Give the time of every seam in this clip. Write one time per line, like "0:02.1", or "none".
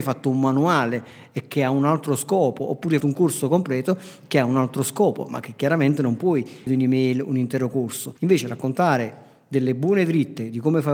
0:03.0
0:06.7
0:08.2